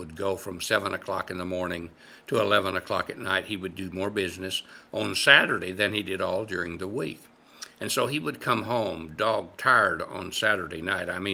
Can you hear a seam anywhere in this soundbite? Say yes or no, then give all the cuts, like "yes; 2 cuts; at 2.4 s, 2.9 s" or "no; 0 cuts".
no; 0 cuts